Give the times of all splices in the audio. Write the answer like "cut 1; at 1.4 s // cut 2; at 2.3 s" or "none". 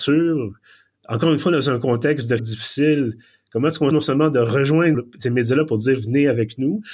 cut 1; at 2.4 s // cut 2; at 3.9 s // cut 3; at 4.9 s